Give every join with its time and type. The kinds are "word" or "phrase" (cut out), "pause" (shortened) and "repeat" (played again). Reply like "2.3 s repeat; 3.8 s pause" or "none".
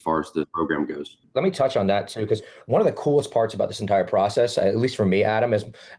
none